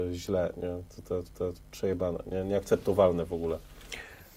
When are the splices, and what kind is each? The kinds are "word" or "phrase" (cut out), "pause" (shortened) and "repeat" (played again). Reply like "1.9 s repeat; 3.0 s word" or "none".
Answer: 1.3 s repeat